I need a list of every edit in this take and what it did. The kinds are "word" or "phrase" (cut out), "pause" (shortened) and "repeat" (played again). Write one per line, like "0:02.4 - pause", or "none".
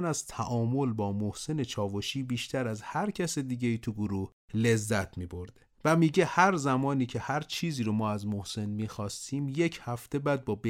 none

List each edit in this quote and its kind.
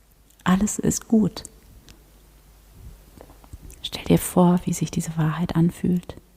0:03.8 - pause

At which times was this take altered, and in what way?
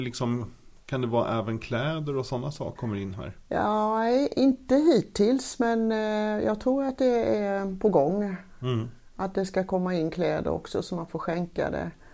0:02.8 - word

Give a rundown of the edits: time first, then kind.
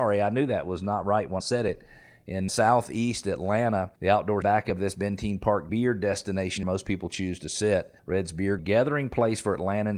0:01.4 - word
0:02.5 - word
0:04.0 - pause
0:04.4 - phrase
0:05.7 - word
0:06.6 - phrase
0:08.0 - pause
0:08.6 - phrase

